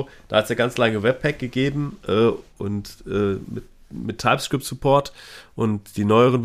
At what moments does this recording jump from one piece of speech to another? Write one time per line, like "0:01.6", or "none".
none